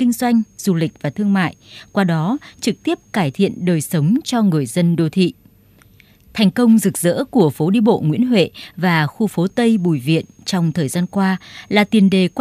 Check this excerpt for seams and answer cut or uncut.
uncut